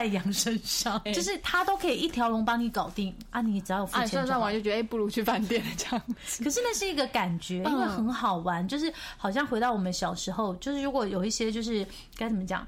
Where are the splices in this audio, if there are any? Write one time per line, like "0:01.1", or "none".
0:01.1